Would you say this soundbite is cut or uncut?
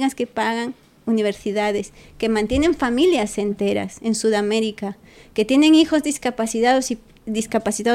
uncut